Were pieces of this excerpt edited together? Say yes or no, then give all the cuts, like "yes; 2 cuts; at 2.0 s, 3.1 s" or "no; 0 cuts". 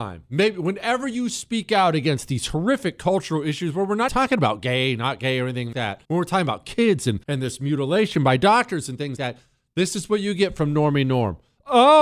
yes; 5 cuts; at 4.1 s, 5.7 s, 6.0 s, 7.2 s, 9.2 s